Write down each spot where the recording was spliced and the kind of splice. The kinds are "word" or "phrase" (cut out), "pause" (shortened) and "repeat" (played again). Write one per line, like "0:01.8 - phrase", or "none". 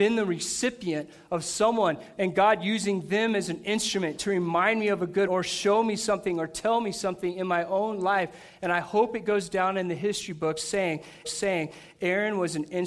0:02.2 - word
0:05.3 - word
0:11.2 - repeat

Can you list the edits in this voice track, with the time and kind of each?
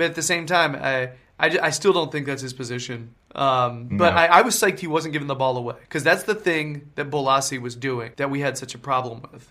0:03.2 - pause
0:05.8 - pause
0:08.1 - pause

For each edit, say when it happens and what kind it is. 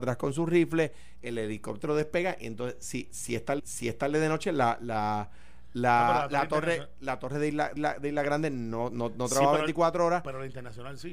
0:03.6 - repeat
0:07.8 - repeat

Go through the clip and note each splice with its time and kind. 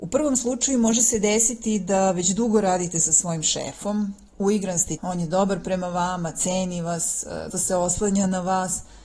0:05.0 - word
0:07.5 - word

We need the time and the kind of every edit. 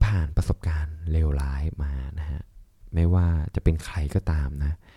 none

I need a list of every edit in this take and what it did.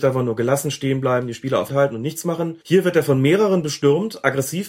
0:01.7 - word
0:02.6 - pause

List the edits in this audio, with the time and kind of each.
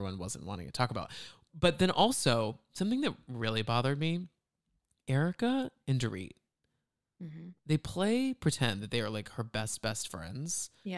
none

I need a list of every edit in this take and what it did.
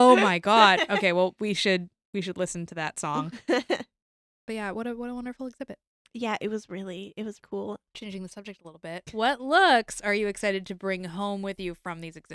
0:07.4 - word

